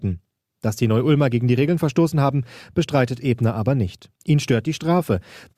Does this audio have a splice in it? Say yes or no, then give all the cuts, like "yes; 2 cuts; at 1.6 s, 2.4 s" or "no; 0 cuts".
yes; 1 cut; at 4.1 s